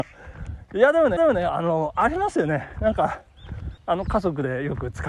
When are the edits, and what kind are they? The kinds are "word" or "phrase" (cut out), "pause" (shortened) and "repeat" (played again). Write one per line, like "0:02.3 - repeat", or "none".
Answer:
0:01.2 - repeat
0:03.8 - pause